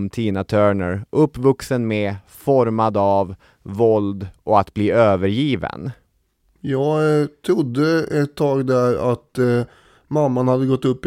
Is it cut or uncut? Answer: uncut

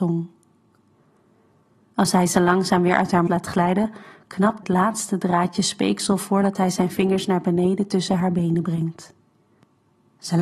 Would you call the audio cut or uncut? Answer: cut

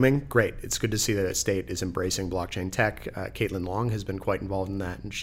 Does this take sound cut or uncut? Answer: uncut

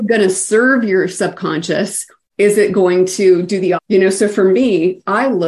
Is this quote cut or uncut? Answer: cut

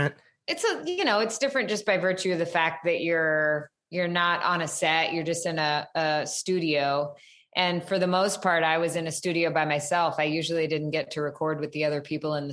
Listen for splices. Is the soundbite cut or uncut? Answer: uncut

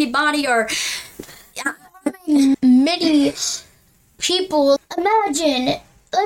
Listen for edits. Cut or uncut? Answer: cut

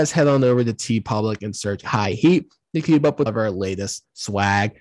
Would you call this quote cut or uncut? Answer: cut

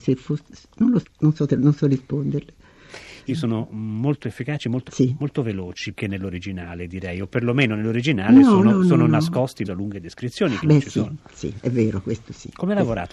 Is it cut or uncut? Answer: cut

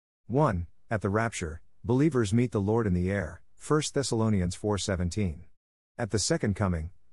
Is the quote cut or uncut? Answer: uncut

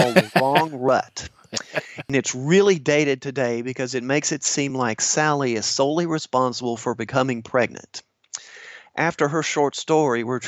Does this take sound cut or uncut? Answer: uncut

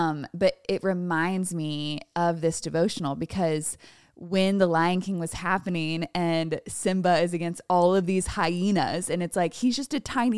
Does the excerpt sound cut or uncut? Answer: uncut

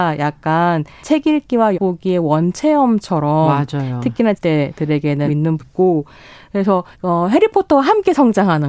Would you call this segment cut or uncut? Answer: cut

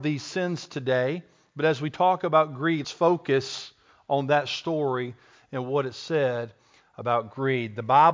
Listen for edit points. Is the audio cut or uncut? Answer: cut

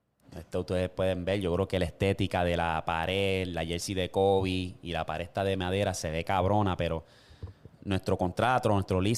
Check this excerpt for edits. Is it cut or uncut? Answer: cut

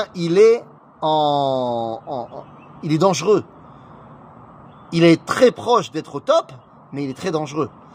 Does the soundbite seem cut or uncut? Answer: uncut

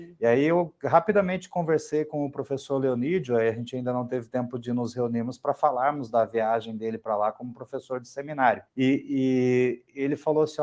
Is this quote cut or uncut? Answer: cut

